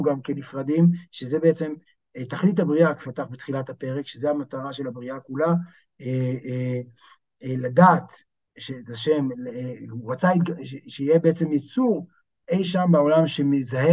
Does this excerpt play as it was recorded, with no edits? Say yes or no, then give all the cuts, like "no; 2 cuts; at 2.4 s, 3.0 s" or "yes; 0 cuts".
no; 1 cut; at 3.0 s